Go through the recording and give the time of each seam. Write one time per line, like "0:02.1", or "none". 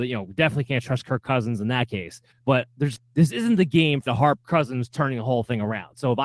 0:02.3
0:02.9
0:04.1
0:04.4